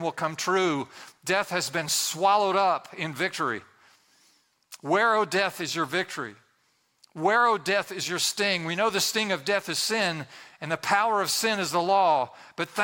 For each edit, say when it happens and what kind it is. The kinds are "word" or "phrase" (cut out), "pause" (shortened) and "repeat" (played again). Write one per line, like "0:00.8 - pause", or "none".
none